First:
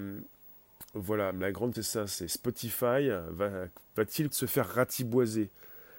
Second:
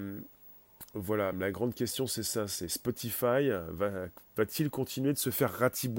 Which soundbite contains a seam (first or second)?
first